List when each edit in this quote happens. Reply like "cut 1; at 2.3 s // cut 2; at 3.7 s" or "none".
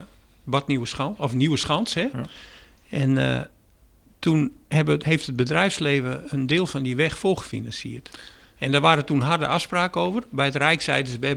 none